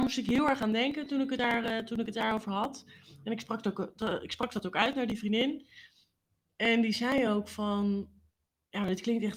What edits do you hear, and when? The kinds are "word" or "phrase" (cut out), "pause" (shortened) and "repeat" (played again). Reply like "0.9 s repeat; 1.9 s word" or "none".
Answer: none